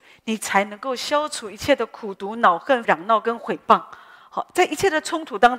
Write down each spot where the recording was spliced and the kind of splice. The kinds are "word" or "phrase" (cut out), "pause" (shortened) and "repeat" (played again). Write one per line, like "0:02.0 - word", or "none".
0:02.8 - phrase